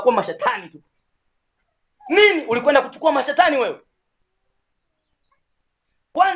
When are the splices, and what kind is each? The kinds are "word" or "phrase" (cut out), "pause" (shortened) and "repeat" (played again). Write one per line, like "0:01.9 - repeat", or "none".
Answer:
none